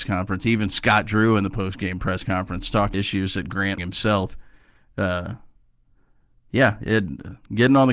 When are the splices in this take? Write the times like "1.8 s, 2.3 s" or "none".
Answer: 2.9 s, 3.8 s

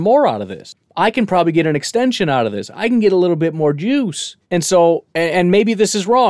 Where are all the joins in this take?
4.4 s, 5.1 s

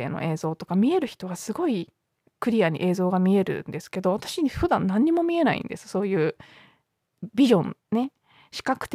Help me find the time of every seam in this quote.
none

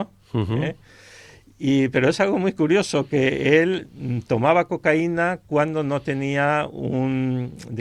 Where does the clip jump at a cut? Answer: none

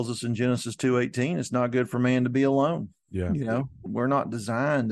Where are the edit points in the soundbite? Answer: 3.9 s

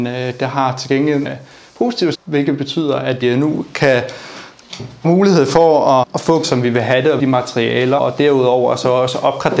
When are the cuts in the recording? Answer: 1.2 s, 2.1 s, 3.2 s, 5.0 s, 6.0 s, 6.4 s, 7.2 s, 8.0 s

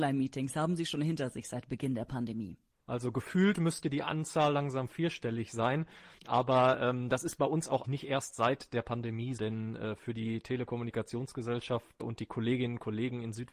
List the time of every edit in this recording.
6.2 s, 7.8 s, 9.4 s, 12.0 s

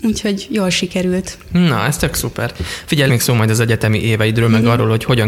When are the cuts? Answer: 3.1 s

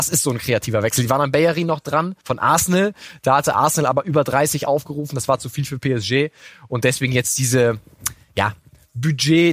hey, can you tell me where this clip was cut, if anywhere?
2.2 s

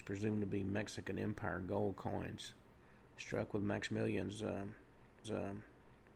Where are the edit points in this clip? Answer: 5.2 s

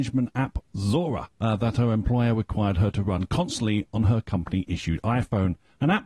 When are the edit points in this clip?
none

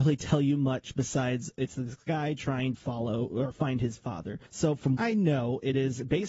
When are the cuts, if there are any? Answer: 2.8 s, 4.5 s, 5.0 s

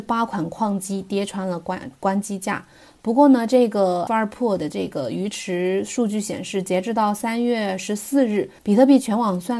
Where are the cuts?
4.1 s, 8.6 s

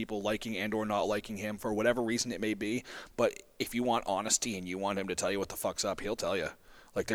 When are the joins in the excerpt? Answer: none

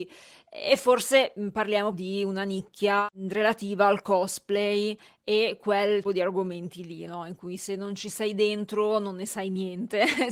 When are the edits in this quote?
1.9 s, 6.0 s

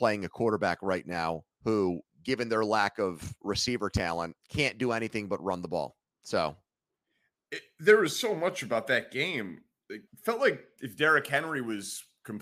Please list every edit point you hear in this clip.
1.5 s, 4.4 s, 6.1 s, 10.1 s

